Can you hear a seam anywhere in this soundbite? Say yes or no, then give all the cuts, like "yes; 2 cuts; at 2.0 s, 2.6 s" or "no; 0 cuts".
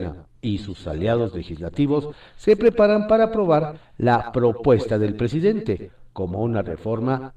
no; 0 cuts